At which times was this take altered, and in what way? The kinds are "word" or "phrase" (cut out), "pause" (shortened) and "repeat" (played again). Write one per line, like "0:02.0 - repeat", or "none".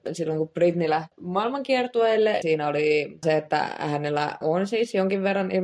0:02.4 - word
0:03.2 - word
0:04.4 - word